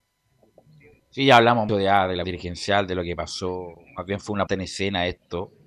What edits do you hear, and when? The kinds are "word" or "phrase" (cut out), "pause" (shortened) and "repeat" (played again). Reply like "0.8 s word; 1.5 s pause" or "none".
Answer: 1.7 s word; 2.2 s word; 4.5 s word